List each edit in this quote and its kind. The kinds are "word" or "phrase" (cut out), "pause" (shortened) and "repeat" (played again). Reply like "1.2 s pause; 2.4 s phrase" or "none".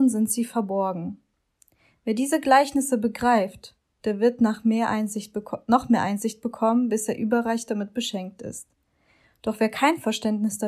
none